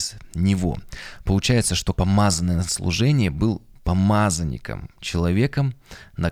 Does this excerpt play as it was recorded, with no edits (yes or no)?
no